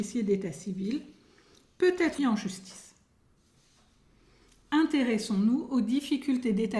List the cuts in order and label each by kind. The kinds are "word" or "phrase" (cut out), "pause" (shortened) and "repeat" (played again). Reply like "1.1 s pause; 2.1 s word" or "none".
2.2 s word